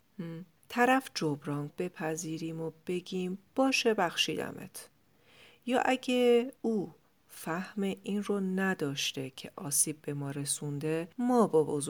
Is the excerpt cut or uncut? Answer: cut